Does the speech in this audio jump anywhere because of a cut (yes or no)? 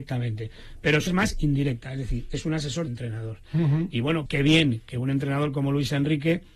yes